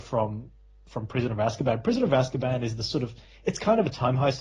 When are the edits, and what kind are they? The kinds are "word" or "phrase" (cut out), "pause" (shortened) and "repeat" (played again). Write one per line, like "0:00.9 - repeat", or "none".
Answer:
none